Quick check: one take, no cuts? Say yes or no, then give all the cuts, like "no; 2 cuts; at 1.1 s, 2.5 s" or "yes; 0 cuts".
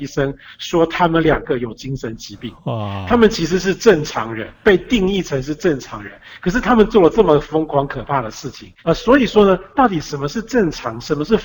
no; 2 cuts; at 4.5 s, 8.8 s